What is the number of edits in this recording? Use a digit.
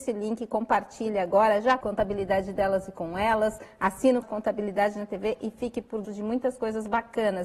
3